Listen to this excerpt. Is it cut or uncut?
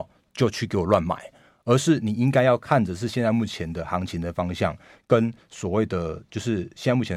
uncut